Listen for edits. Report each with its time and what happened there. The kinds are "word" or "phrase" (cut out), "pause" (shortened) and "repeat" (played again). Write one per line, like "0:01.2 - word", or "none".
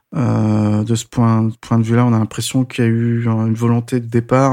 none